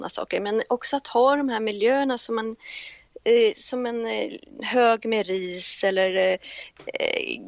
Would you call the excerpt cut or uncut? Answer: uncut